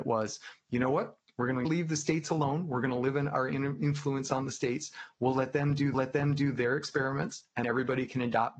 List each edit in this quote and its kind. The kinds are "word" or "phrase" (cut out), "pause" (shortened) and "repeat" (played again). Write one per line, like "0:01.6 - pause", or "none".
0:05.9 - repeat
0:07.6 - word